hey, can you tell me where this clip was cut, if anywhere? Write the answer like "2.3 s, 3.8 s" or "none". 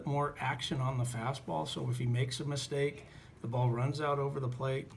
none